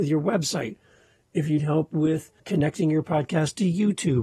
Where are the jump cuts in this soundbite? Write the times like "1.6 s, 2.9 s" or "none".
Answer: 1.6 s, 2.4 s